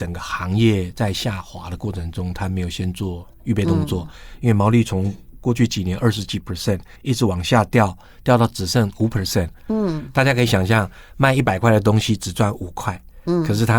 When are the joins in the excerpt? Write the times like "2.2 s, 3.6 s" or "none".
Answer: 7.0 s